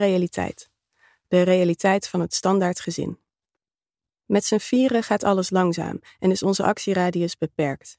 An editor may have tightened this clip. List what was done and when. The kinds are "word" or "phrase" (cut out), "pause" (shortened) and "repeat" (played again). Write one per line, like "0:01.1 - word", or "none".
0:03.6 - pause